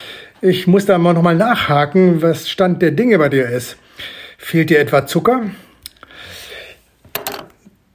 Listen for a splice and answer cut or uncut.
uncut